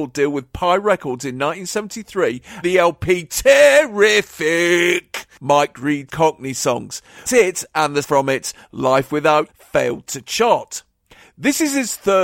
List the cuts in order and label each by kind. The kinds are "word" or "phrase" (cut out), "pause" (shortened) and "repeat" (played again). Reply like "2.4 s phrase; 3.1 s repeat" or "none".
2.6 s word; 6.1 s word; 7.3 s word; 8.0 s word; 9.5 s word